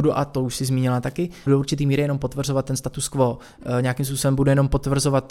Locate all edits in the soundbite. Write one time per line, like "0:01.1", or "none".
0:01.5